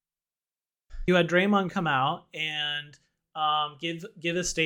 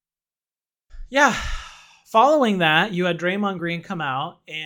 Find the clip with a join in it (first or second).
first